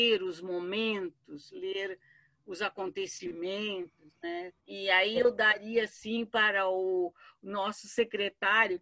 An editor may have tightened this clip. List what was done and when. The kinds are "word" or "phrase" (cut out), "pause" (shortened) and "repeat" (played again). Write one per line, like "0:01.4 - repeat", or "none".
0:04.6 - pause